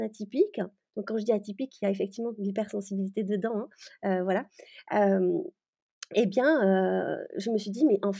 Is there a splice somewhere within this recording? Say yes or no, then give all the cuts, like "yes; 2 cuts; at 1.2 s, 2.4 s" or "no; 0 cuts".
no; 0 cuts